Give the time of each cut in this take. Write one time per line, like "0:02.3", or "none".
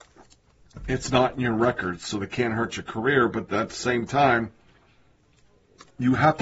none